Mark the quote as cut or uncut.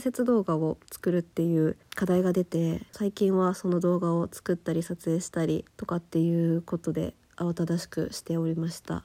cut